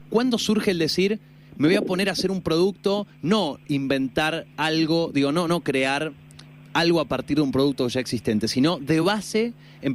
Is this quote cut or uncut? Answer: uncut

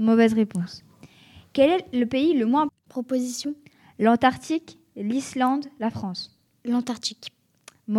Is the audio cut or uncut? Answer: cut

